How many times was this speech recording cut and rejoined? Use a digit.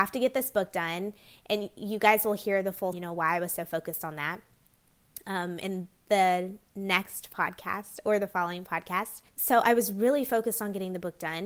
2